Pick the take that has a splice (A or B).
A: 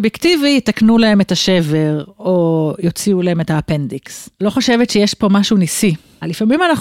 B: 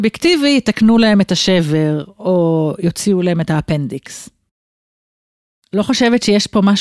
A